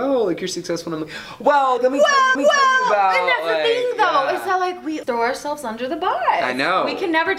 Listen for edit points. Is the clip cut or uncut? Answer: cut